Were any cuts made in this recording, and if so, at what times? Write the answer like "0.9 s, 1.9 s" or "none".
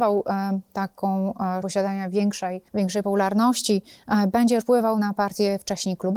1.6 s, 2.7 s, 4.6 s